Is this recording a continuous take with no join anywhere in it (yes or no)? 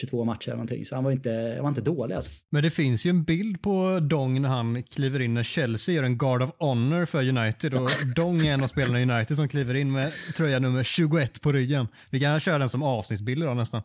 yes